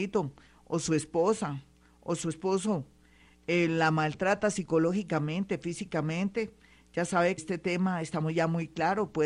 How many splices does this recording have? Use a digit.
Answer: 1